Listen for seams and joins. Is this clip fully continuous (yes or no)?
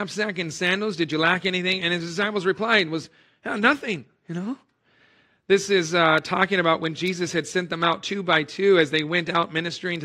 yes